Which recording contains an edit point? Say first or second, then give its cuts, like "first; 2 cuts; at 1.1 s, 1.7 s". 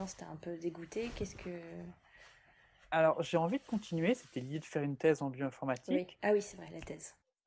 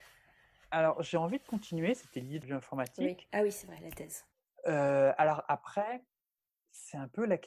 second; 1 cut; at 2.4 s